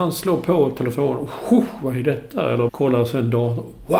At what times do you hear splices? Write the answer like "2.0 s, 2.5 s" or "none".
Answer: 2.7 s